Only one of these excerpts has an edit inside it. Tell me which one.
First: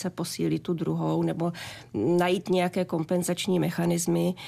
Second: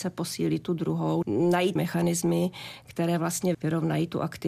second; 3 cuts; at 1.2 s, 1.8 s, 3.5 s

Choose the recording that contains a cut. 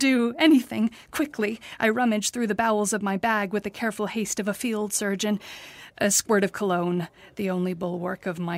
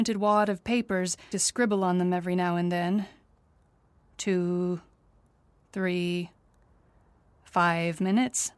second; 1 cut; at 1.3 s

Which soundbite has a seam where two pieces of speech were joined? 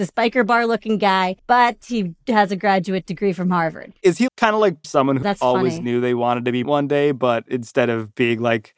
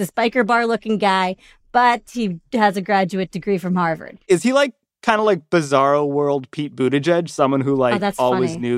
first; 5 cuts; at 1.4 s, 4.3 s, 4.8 s, 5.2 s, 6.6 s

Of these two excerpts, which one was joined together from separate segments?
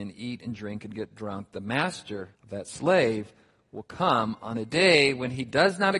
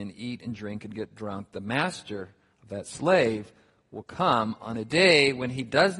first; 1 cut; at 2.3 s

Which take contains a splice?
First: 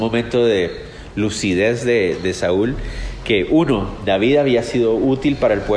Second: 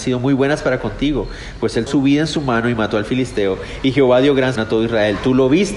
second; 2 cuts; at 1.9 s, 4.6 s

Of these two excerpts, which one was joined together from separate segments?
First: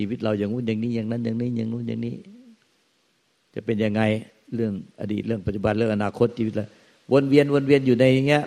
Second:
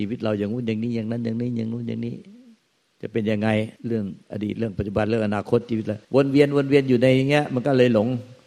second; 3 cuts; at 2.6 s, 3.8 s, 6.0 s

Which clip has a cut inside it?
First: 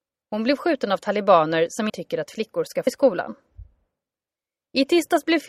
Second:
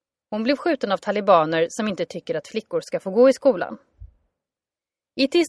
first; 2 cuts; at 1.9 s, 2.9 s

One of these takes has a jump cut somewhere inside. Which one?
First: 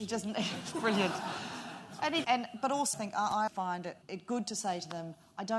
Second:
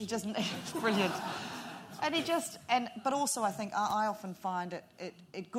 first; 4 cuts; at 2.2 s, 2.9 s, 3.5 s, 4.0 s

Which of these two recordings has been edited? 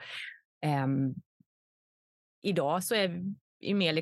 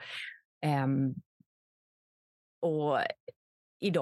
first; 1 cut; at 2.3 s

